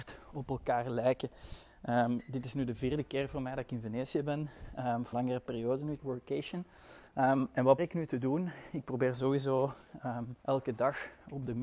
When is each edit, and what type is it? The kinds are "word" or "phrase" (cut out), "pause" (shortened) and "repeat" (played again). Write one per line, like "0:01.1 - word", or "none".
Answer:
0:05.1 - word
0:06.0 - phrase
0:07.1 - pause
0:07.8 - word
0:10.4 - pause